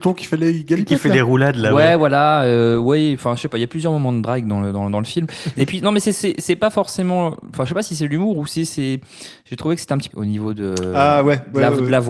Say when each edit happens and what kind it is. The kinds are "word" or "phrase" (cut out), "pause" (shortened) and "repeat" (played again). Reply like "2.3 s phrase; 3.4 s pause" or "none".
10.1 s word